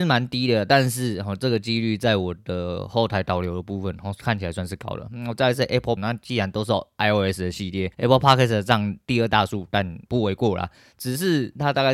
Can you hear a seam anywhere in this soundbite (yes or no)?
yes